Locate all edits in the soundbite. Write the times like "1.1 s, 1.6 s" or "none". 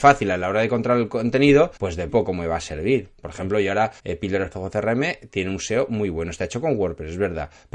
1.8 s, 2.1 s, 4.0 s, 4.5 s

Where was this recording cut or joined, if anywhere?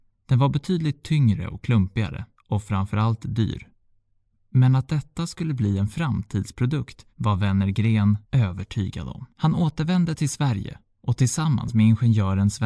2.4 s, 4.0 s, 7.1 s, 8.2 s, 9.3 s

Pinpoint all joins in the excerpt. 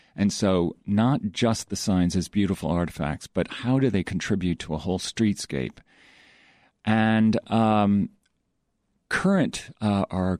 none

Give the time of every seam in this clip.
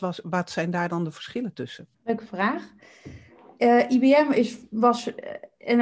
1.9 s

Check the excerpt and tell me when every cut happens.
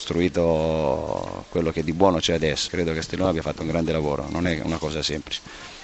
2.7 s

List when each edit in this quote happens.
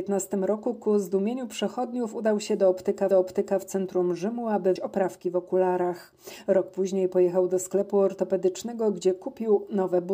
3.1 s, 4.8 s

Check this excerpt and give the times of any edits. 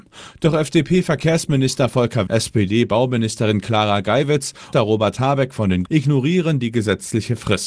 2.3 s, 4.7 s, 5.9 s

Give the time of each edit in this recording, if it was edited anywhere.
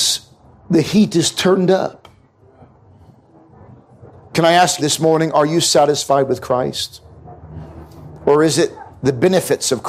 4.8 s

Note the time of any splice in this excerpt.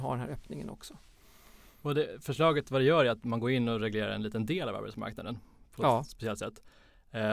none

